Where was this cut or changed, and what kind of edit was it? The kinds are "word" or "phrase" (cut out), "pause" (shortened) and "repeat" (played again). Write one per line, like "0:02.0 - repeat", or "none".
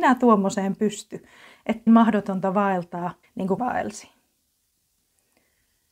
0:01.9 - word
0:03.2 - word
0:03.6 - word